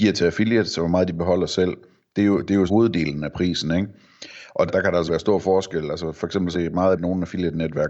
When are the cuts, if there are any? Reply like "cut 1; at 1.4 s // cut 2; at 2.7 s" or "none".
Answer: cut 1; at 2.7 s // cut 2; at 4.7 s // cut 3; at 5.1 s // cut 4; at 6.5 s // cut 5; at 6.9 s